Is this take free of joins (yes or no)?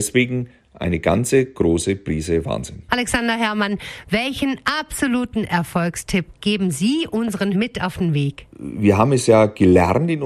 no